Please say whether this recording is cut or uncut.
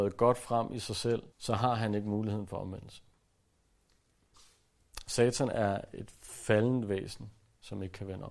cut